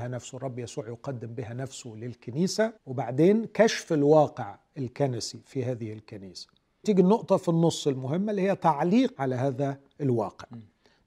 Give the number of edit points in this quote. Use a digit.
3